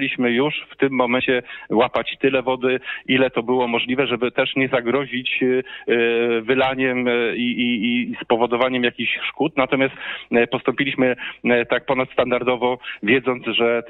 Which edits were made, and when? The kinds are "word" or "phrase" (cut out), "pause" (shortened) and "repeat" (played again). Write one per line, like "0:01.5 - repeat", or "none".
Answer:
none